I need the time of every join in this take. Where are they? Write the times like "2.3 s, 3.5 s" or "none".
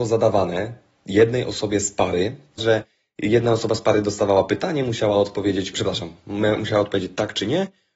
2.6 s, 5.7 s